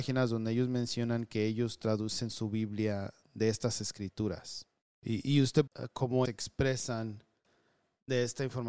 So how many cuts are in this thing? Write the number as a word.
two